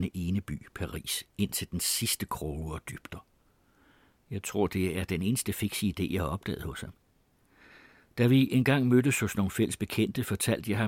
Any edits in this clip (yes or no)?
no